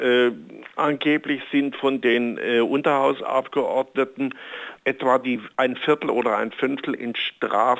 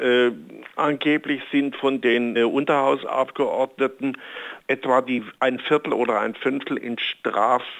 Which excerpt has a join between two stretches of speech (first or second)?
second